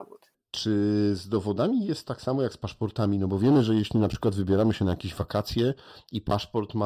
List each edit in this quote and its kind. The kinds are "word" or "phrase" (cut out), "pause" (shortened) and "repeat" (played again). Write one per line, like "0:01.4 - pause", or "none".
none